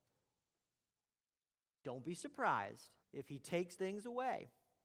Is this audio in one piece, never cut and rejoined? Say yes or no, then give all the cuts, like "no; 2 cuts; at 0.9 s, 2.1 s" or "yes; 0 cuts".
no; 2 cuts; at 3.0 s, 3.8 s